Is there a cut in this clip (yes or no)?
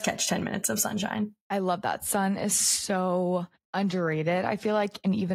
yes